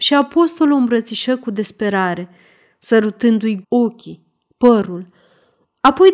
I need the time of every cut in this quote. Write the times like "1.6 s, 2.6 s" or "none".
3.6 s